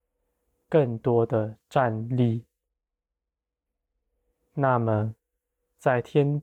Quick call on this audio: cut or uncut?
uncut